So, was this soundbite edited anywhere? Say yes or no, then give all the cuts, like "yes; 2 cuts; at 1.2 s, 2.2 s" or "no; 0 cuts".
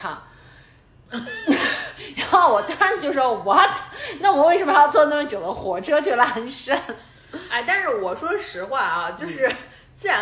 no; 0 cuts